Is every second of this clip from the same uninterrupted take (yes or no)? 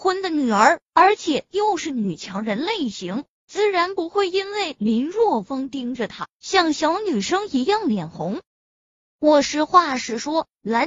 no